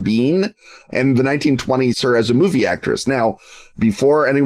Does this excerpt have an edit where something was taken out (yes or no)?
yes